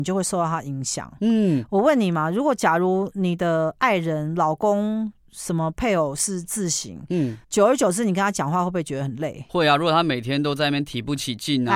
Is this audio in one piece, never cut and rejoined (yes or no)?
no